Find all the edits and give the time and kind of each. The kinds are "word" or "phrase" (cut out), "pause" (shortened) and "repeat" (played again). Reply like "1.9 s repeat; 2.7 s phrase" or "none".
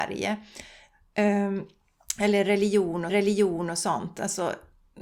3.1 s repeat